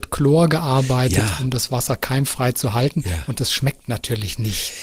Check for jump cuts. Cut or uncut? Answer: uncut